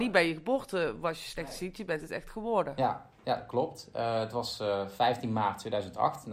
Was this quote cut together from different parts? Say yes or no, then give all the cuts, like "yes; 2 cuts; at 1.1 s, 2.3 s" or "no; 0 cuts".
no; 0 cuts